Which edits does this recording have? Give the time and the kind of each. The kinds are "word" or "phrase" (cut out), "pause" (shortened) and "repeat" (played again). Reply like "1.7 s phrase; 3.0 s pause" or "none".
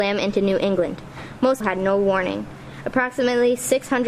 1.6 s word